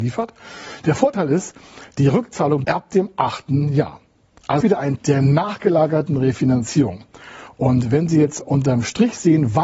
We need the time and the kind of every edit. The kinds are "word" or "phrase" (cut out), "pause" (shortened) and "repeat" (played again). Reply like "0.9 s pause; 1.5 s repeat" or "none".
2.6 s word; 4.6 s word; 5.0 s word; 8.4 s word